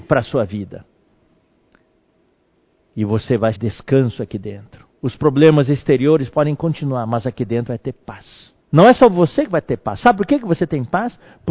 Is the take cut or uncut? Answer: cut